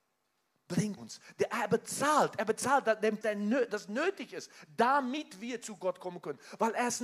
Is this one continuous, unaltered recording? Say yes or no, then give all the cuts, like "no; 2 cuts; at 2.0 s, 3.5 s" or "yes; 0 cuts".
no; 2 cuts; at 1.0 s, 3.2 s